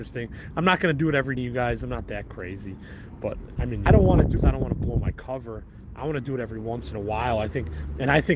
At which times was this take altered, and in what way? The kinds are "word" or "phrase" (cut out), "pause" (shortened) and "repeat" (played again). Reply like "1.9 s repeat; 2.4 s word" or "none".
1.4 s word; 3.6 s word; 3.9 s phrase; 4.4 s word